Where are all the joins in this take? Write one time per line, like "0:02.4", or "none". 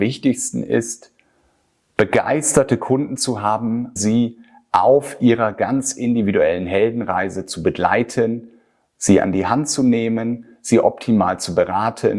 0:04.0